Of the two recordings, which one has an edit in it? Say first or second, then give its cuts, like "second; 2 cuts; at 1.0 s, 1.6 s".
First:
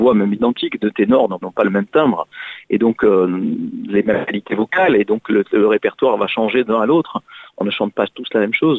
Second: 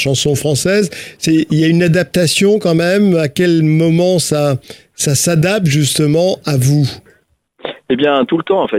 first; 1 cut; at 1.4 s